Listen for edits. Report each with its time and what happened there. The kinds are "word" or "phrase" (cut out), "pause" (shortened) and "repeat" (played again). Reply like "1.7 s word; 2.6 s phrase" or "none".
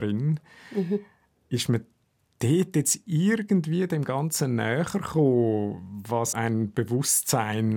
6.3 s word

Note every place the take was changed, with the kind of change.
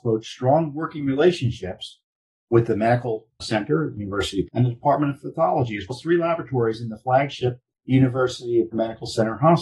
2.2 s pause; 3.4 s word; 4.5 s word; 5.9 s word; 7.7 s pause; 8.7 s word

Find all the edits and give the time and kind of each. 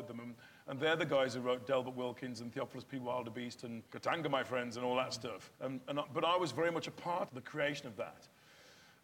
3.9 s pause; 5.5 s pause; 7.3 s phrase

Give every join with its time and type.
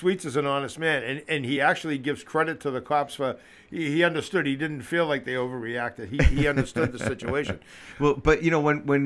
none

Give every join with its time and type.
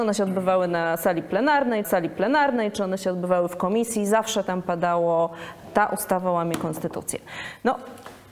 1.8 s repeat

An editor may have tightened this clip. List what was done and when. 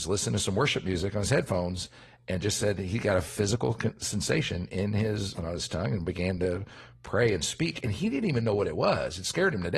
5.4 s word

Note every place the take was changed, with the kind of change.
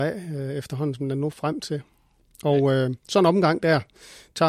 1.3 s word

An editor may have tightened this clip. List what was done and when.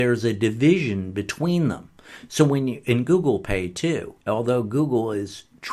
4.2 s pause

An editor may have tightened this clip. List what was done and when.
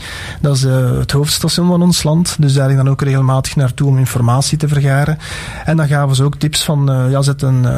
none

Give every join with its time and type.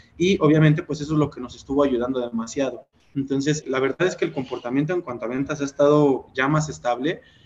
3.6 s word

